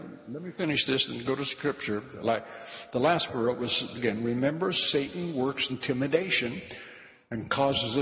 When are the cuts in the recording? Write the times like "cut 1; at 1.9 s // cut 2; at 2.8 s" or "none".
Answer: cut 1; at 3.3 s // cut 2; at 3.9 s // cut 3; at 5.7 s